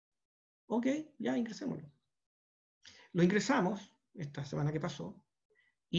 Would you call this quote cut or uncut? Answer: uncut